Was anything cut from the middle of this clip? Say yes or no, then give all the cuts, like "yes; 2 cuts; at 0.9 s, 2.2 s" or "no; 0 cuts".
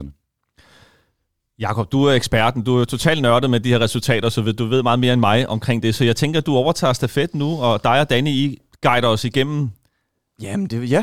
no; 0 cuts